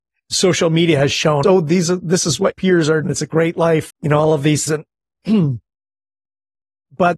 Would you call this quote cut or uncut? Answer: cut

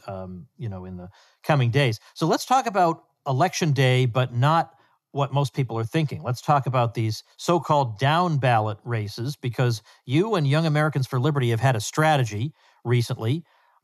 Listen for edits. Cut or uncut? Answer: cut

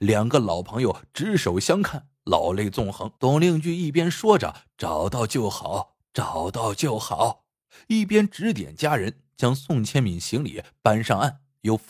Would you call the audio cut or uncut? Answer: cut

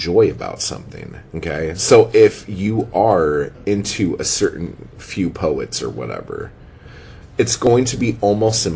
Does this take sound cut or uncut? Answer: cut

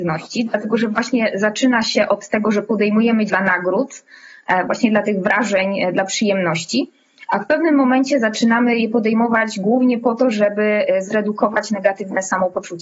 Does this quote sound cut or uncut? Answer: cut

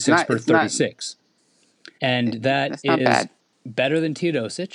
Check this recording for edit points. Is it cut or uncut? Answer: cut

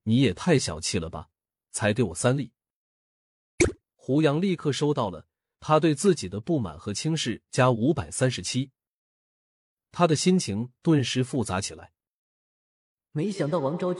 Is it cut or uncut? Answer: uncut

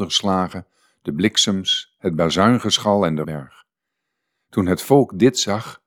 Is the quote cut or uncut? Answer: cut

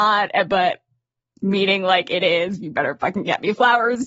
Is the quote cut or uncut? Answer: uncut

